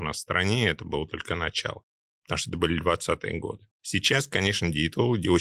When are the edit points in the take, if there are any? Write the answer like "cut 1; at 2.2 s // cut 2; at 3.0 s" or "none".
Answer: cut 1; at 3.7 s